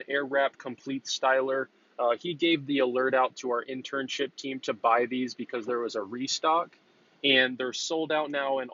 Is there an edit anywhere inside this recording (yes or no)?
no